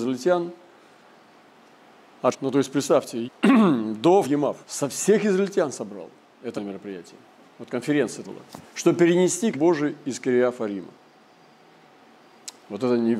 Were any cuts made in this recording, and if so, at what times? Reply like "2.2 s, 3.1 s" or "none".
2.3 s, 3.2 s, 4.2 s, 4.6 s, 6.6 s, 8.2 s, 8.7 s, 9.5 s